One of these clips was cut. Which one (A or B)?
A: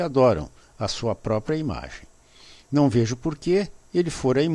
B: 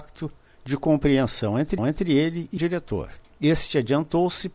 B